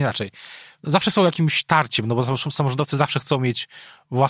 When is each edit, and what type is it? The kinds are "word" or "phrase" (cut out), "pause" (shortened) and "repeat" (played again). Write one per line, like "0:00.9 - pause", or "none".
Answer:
none

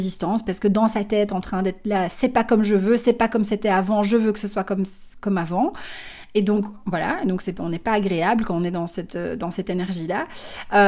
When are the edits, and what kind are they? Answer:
none

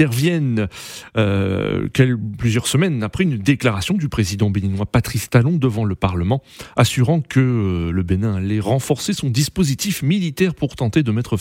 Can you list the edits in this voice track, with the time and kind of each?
none

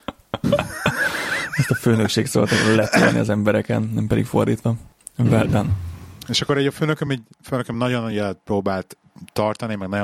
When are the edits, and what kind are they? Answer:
none

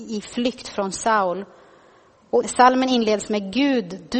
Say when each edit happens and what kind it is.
0:02.4 - word

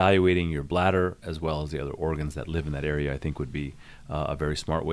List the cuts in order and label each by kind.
none

